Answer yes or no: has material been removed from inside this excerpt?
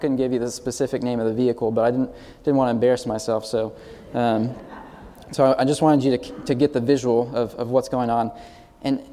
no